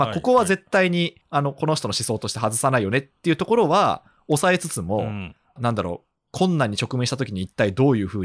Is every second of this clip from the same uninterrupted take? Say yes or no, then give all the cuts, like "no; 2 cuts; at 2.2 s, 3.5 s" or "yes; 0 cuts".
no; 2 cuts; at 1.2 s, 5.6 s